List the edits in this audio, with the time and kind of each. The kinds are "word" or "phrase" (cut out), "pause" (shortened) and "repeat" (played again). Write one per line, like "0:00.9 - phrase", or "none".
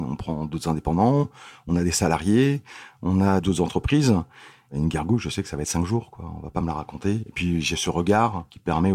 none